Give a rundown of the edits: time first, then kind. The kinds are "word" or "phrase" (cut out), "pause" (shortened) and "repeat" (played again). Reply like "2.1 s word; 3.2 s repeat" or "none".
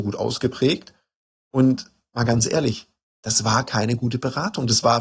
none